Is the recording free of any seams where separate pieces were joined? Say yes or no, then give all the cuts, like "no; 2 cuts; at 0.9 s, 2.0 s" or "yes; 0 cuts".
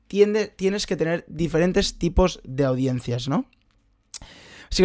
yes; 0 cuts